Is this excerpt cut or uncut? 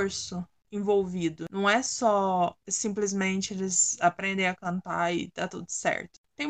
uncut